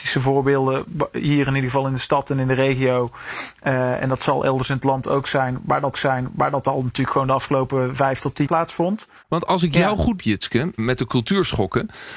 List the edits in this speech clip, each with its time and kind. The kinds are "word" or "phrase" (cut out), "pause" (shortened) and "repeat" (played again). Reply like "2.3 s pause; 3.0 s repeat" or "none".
5.9 s repeat; 8.5 s word; 10.2 s word; 10.8 s word